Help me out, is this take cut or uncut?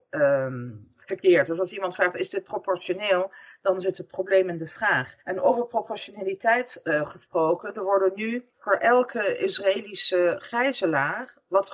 cut